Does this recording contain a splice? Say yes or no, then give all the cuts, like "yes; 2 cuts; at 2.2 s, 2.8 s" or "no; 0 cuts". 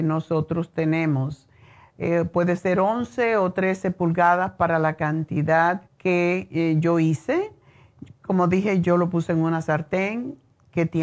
yes; 1 cut; at 5.9 s